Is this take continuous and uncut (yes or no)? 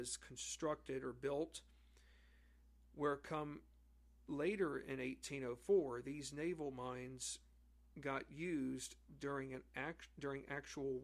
yes